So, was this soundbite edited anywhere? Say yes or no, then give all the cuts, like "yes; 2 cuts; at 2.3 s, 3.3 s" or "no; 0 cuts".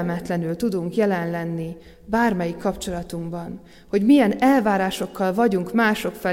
no; 0 cuts